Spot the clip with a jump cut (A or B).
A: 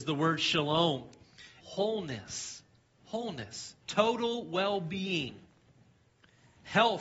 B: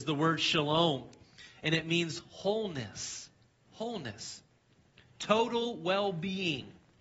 A